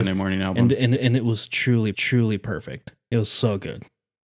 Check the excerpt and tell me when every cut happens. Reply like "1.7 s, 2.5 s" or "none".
1.0 s, 1.9 s